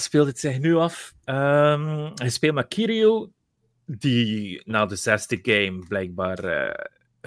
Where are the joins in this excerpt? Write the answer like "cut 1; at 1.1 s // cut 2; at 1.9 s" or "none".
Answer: none